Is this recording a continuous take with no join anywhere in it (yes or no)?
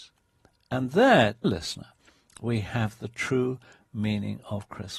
no